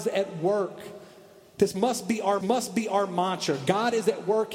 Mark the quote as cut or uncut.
cut